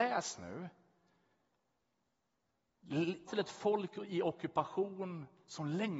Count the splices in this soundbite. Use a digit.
1